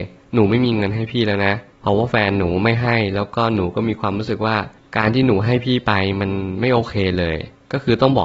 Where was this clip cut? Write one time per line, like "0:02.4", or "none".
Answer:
none